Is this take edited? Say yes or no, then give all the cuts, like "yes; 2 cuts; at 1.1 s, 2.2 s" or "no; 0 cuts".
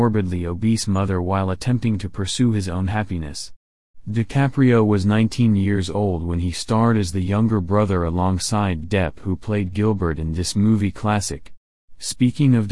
yes; 1 cut; at 8.8 s